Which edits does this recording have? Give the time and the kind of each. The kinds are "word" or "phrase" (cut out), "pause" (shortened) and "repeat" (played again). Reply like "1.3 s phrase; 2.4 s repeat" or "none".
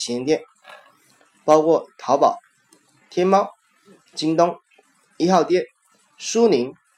none